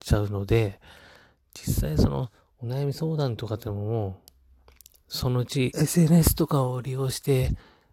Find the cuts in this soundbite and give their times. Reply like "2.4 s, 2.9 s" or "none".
5.7 s